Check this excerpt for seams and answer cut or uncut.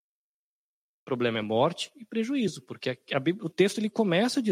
uncut